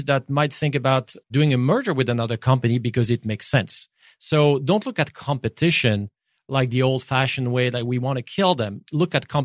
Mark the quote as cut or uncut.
uncut